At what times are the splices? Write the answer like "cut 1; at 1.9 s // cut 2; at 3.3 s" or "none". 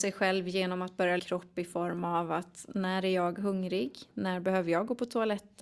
cut 1; at 1.2 s